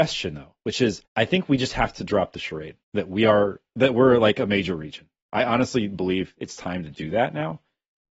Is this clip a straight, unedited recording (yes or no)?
no